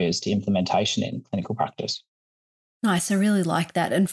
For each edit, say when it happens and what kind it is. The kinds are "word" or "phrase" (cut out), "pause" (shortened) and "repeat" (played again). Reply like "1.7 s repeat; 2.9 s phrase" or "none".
none